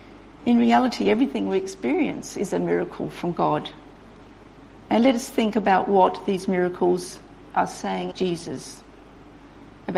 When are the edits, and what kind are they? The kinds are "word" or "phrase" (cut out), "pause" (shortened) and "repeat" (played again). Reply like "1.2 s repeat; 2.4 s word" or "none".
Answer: 8.1 s word